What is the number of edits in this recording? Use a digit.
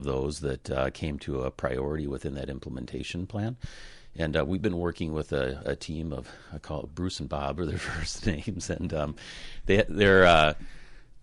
0